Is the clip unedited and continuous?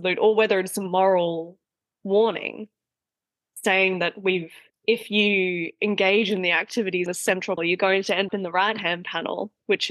no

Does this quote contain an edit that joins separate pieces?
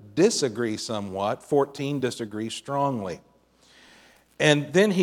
no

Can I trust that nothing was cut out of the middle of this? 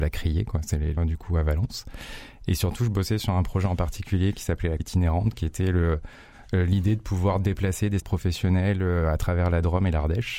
no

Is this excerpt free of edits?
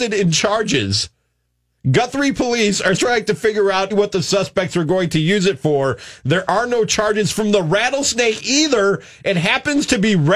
no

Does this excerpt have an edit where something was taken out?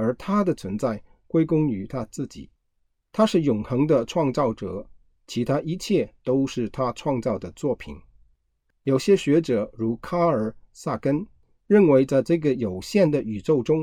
no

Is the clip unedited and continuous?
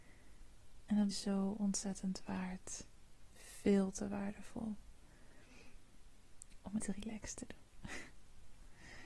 no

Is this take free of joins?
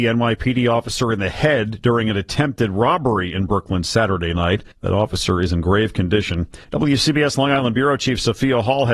no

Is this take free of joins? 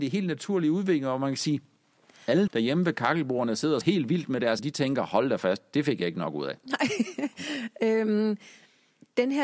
no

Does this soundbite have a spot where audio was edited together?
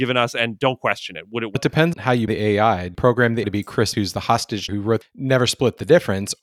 yes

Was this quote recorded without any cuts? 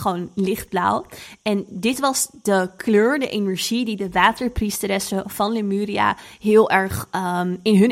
yes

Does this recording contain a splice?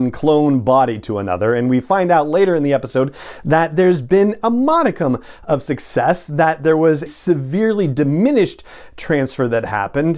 yes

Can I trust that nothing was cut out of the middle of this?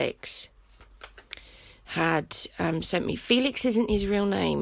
yes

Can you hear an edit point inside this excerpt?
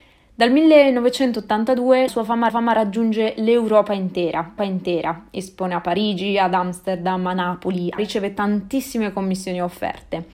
yes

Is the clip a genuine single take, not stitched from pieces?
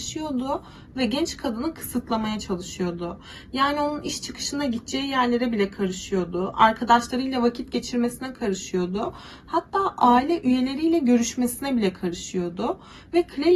yes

